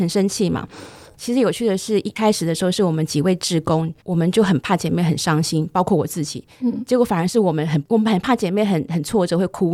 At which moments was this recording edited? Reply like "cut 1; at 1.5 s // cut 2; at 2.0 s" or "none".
cut 1; at 4.0 s